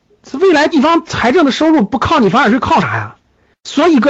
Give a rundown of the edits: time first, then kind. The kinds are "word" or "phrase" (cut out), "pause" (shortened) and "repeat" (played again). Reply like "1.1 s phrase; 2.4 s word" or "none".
none